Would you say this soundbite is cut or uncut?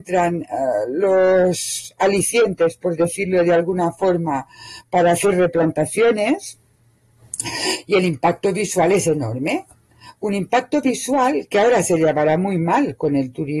uncut